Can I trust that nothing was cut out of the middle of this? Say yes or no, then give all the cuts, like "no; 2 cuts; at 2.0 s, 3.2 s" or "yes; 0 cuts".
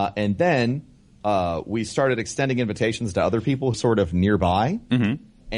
no; 1 cut; at 3.7 s